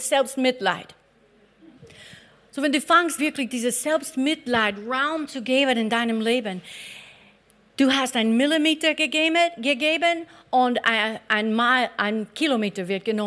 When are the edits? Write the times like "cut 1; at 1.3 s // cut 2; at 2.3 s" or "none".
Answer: cut 1; at 3.2 s